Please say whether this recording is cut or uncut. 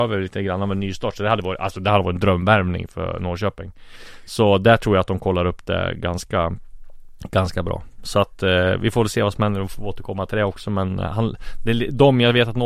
uncut